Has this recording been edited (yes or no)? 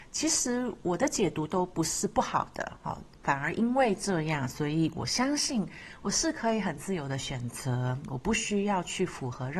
no